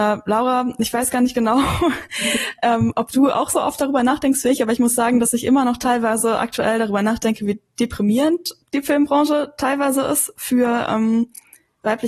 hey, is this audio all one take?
no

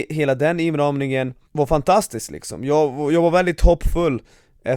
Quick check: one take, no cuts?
no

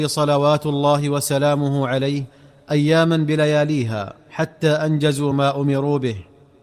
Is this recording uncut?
yes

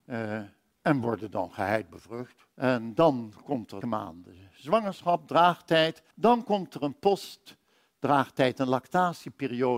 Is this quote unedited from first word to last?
no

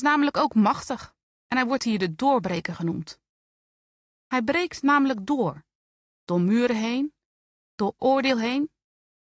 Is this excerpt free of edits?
no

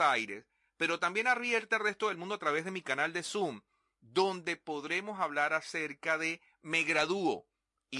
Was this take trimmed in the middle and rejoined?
no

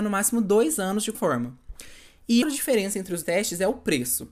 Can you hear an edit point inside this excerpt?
yes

